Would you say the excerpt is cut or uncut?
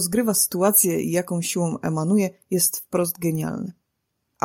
uncut